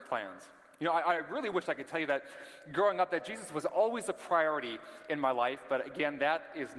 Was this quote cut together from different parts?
no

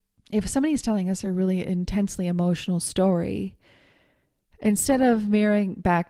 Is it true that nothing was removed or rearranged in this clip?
yes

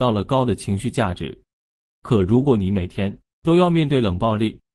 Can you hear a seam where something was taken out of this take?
no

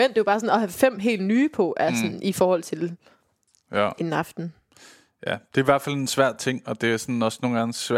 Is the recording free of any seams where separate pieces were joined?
yes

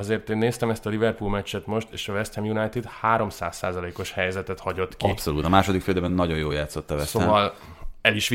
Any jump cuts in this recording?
no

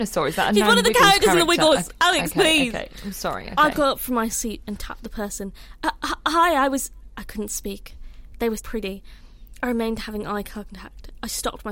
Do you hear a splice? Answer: yes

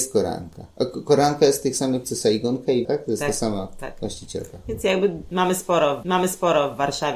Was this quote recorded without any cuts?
no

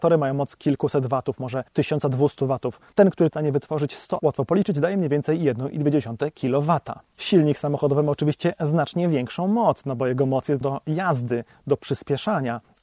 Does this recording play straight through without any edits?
no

